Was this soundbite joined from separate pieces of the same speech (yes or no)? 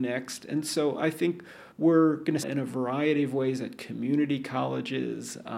yes